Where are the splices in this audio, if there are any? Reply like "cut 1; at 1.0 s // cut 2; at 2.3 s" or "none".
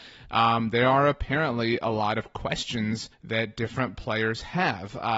cut 1; at 3.1 s